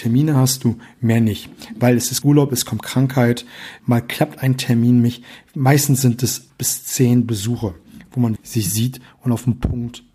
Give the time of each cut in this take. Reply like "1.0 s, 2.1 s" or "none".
2.2 s, 3.8 s, 6.5 s, 8.4 s